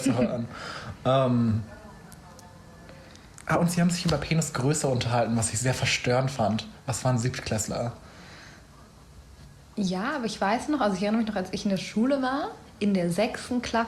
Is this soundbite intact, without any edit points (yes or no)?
yes